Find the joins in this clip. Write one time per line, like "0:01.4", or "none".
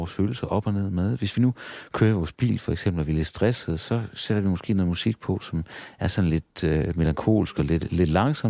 none